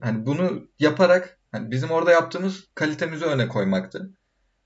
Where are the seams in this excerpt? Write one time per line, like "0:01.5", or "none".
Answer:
0:01.5
0:02.7